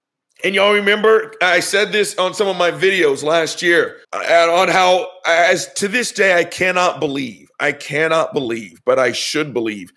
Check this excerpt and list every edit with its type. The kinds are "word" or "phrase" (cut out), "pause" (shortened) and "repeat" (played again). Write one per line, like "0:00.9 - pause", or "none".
0:04.0 - pause

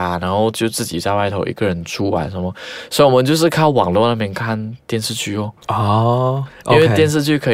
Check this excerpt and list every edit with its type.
0:05.6 - pause

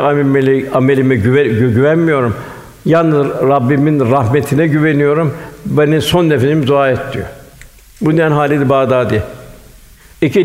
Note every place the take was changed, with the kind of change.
0:07.8 - pause

